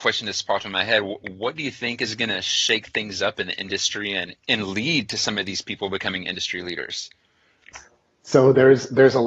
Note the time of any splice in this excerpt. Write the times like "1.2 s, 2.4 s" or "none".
4.4 s